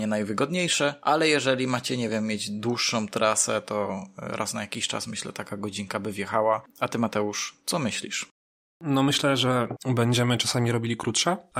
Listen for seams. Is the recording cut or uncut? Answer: uncut